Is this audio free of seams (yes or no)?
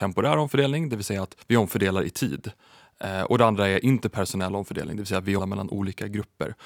no